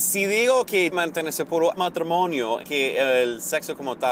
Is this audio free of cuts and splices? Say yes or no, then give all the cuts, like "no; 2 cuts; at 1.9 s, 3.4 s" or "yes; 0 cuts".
no; 3 cuts; at 0.9 s, 1.8 s, 2.6 s